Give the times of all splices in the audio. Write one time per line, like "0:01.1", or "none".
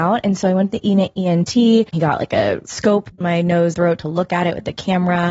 0:01.9
0:03.2
0:03.7